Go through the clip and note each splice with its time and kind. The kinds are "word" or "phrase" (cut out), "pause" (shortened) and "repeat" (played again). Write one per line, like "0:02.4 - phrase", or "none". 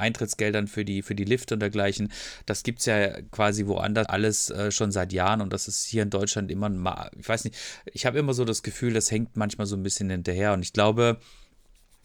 0:04.0 - word